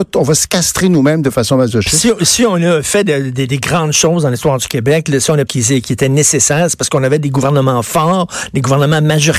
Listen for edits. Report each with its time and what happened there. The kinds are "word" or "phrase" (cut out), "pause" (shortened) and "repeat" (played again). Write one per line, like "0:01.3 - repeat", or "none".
0:05.5 - phrase

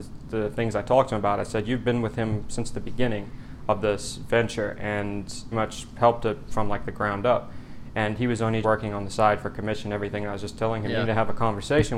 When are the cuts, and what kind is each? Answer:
0:05.5 - word
0:08.6 - word

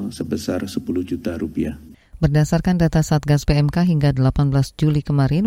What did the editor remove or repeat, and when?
none

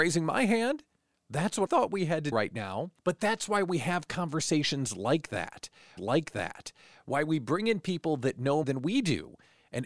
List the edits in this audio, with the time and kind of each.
0:01.7 - word
0:02.3 - word
0:03.0 - pause
0:06.0 - repeat
0:08.6 - word

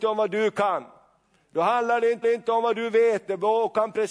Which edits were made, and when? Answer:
0:02.2 - repeat

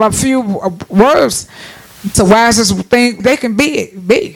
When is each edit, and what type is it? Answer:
0:02.1 - word
0:03.2 - word

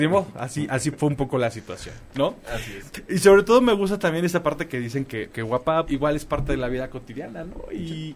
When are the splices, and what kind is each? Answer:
0:05.3 - word
0:05.9 - word

